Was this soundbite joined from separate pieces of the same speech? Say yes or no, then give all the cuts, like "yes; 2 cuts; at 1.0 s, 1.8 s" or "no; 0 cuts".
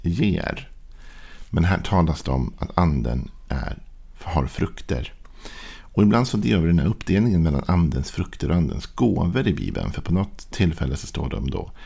no; 0 cuts